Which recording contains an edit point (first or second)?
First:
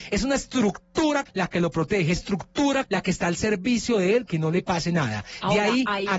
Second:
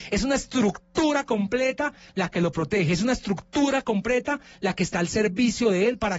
first